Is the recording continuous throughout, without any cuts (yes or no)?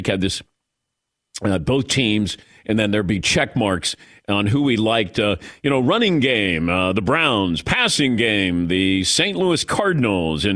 yes